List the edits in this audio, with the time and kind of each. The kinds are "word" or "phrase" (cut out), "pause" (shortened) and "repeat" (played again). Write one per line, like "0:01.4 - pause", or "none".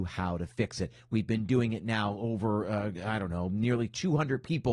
none